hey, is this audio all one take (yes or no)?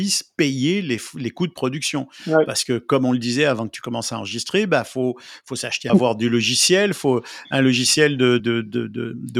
no